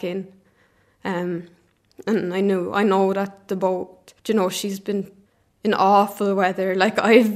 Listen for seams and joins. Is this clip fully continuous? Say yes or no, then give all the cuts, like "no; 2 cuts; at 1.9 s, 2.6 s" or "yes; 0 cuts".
no; 2 cuts; at 4.2 s, 5.3 s